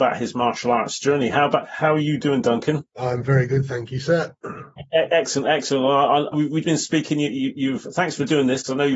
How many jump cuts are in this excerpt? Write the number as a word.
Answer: three